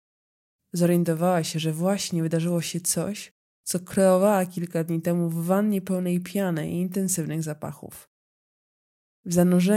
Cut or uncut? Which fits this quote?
uncut